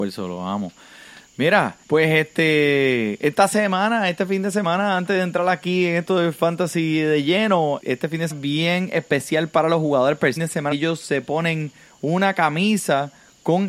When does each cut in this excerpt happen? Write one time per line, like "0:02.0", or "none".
0:01.8
0:07.8
0:08.3
0:10.4
0:10.7